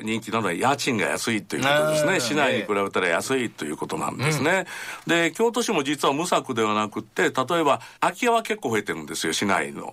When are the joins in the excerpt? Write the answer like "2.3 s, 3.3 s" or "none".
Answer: 8.0 s